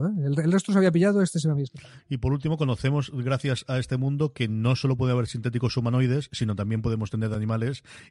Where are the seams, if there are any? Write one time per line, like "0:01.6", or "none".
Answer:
none